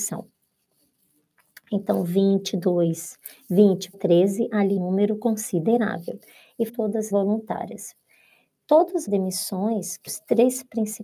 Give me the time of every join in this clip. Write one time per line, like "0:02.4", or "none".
0:03.9
0:04.8
0:06.7
0:07.1
0:09.1
0:10.1